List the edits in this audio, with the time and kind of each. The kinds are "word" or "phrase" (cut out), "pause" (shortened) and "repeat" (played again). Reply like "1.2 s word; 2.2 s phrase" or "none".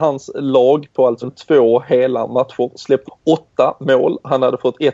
1.2 s word; 3.1 s word